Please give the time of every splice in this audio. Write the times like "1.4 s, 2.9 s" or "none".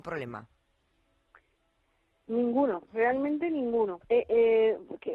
4.0 s